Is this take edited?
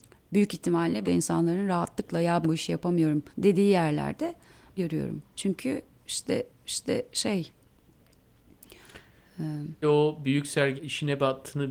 yes; 8 cuts; at 1.0 s, 2.4 s, 3.3 s, 4.8 s, 5.3 s, 6.5 s, 9.8 s, 10.8 s

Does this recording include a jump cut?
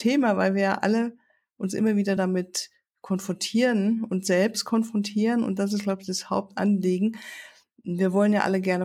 no; 0 cuts

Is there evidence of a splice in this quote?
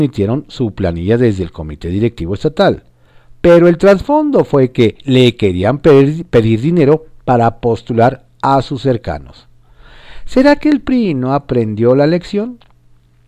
no; 0 cuts

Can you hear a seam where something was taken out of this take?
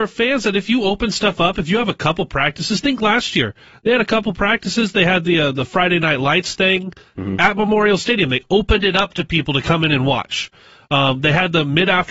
no; 0 cuts

